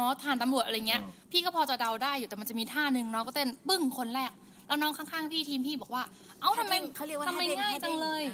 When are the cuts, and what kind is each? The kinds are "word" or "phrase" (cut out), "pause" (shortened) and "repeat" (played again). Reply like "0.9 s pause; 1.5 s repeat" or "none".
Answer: 1.2 s pause